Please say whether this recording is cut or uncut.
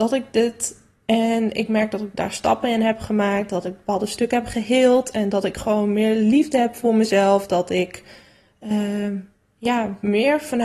uncut